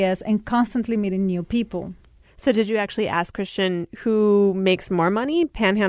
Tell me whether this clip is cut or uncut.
uncut